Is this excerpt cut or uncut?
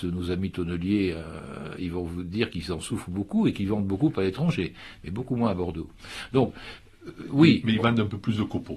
uncut